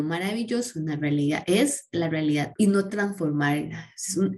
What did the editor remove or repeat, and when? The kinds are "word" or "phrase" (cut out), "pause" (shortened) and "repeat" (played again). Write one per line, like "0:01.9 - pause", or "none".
0:02.5 - word
0:02.9 - word